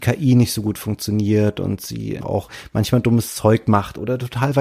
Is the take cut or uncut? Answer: cut